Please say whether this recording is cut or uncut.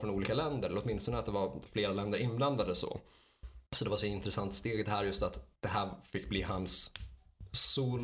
cut